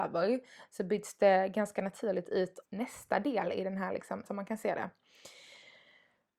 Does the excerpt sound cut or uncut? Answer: cut